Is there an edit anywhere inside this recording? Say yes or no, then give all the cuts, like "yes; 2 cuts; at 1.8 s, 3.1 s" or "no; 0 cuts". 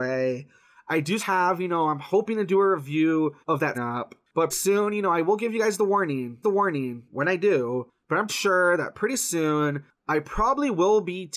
yes; 6 cuts; at 1.2 s, 3.4 s, 3.7 s, 4.5 s, 6.4 s, 8.3 s